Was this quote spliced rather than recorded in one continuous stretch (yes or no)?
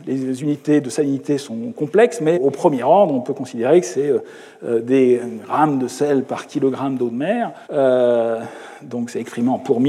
yes